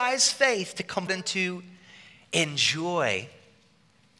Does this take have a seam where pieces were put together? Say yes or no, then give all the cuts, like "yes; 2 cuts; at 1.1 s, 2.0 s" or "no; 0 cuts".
yes; 1 cut; at 1.1 s